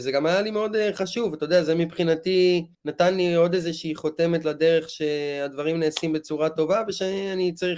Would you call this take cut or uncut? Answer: cut